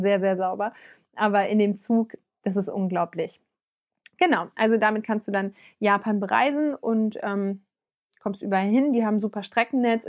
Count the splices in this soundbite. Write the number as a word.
zero